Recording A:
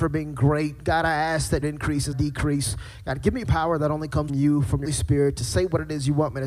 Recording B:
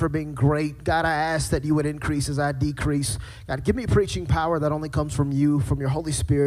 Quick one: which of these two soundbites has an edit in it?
A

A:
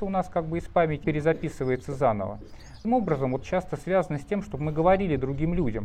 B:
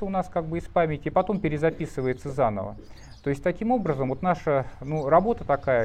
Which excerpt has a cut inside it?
A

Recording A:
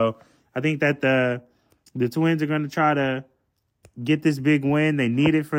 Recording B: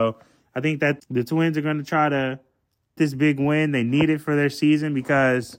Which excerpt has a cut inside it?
B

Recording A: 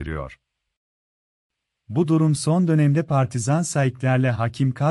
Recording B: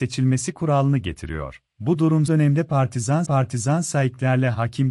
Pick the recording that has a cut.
B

